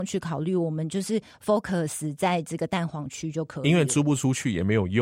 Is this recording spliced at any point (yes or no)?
no